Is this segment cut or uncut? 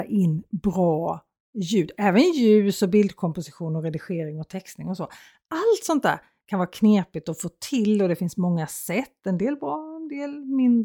uncut